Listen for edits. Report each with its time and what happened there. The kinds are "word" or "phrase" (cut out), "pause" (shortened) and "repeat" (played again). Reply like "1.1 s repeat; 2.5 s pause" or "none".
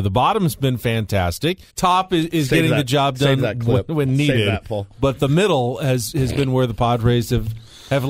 1.7 s pause